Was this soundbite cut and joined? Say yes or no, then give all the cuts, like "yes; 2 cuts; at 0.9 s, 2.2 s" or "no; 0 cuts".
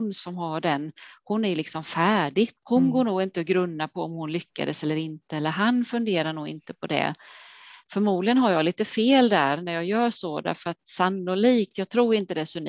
yes; 1 cut; at 2.6 s